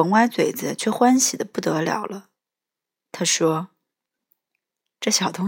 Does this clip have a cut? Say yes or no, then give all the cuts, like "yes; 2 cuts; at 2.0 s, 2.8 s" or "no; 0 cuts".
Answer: no; 0 cuts